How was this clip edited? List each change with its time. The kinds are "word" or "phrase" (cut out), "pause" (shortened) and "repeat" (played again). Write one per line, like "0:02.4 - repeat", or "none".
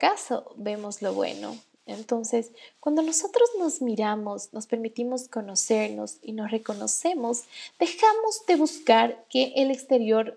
none

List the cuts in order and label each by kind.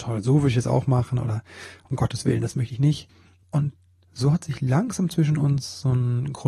none

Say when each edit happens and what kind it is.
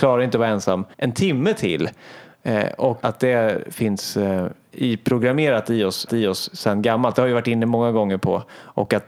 0:00.9 - pause
0:03.0 - word
0:06.1 - repeat

